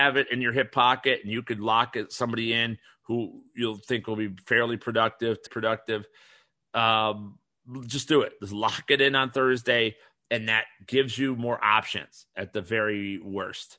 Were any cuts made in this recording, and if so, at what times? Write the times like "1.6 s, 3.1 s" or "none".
5.5 s